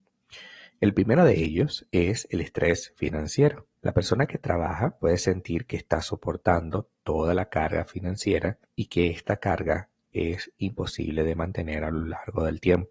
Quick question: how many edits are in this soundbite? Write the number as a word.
two